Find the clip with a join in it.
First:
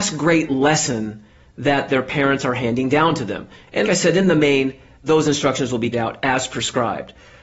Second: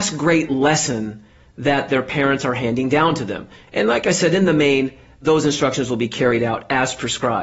first; 2 cuts; at 3.8 s, 5.9 s

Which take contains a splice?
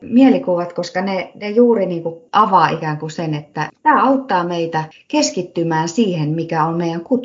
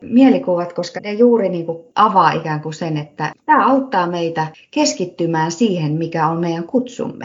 second; 1 cut; at 1.0 s

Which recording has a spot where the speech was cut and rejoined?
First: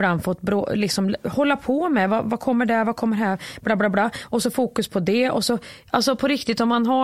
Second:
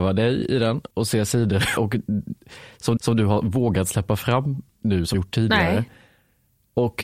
second; 5 cuts; at 0.9 s, 1.8 s, 3.0 s, 4.7 s, 5.1 s

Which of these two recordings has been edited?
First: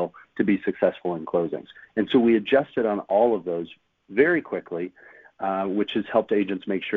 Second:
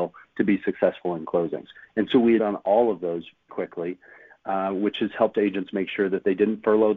second; 2 cuts; at 2.4 s, 3.5 s

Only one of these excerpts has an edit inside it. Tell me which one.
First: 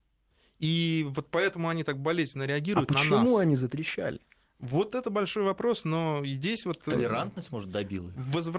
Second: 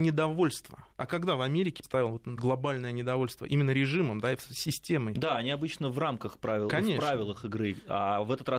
second; 3 cuts; at 0.9 s, 1.8 s, 2.4 s

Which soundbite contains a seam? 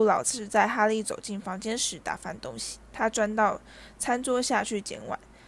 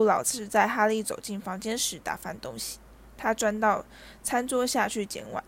first; 1 cut; at 2.8 s

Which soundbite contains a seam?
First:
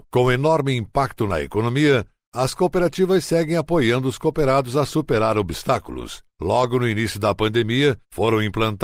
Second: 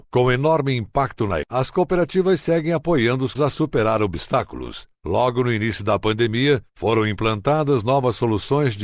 second; 2 cuts; at 1.4 s, 3.4 s

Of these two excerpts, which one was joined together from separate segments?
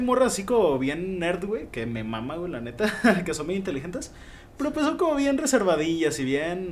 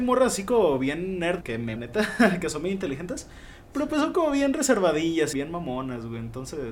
second; 3 cuts; at 1.4 s, 1.8 s, 5.3 s

